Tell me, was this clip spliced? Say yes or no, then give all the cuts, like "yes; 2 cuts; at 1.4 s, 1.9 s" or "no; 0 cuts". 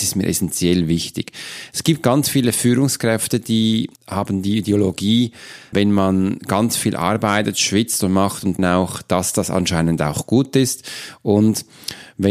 yes; 3 cuts; at 4.0 s, 5.7 s, 8.6 s